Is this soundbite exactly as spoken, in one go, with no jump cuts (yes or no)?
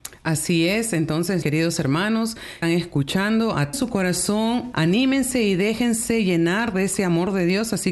no